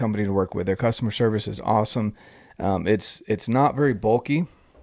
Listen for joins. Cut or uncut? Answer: uncut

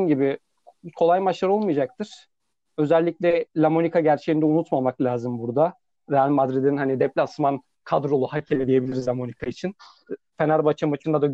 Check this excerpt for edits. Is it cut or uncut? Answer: cut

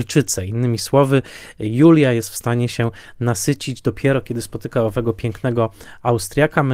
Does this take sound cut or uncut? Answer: uncut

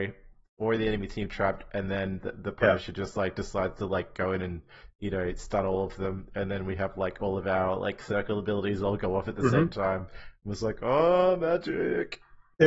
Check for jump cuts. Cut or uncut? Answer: uncut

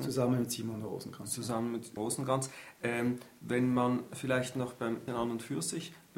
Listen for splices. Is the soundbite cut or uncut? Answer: cut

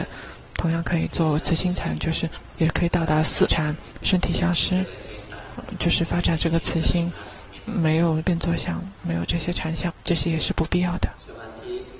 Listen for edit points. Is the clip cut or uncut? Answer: cut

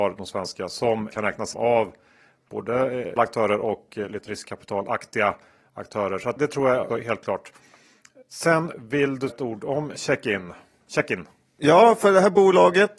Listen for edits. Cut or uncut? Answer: cut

